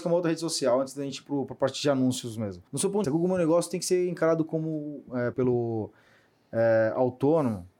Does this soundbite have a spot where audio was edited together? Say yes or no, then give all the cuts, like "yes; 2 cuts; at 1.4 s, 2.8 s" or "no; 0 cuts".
yes; 3 cuts; at 2.7 s, 3.0 s, 5.3 s